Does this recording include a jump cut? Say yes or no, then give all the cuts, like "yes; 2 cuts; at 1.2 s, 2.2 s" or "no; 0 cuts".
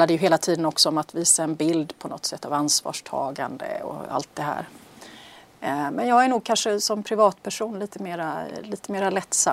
no; 0 cuts